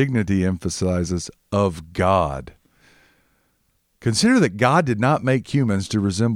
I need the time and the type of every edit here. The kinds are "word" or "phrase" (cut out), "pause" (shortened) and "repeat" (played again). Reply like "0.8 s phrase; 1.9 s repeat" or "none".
none